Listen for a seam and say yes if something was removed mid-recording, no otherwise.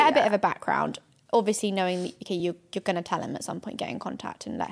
no